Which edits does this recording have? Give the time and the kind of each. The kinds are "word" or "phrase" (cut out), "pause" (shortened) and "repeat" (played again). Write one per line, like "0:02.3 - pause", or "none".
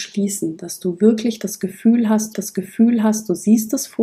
0:02.3 - repeat